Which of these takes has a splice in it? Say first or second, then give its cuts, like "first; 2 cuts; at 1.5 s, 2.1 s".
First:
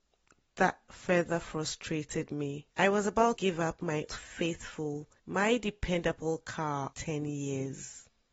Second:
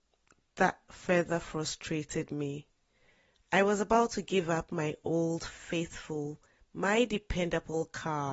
first; 5 cuts; at 2.7 s, 3.3 s, 4.1 s, 5.2 s, 6.9 s